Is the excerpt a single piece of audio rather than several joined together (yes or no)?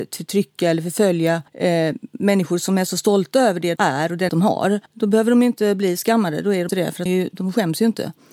no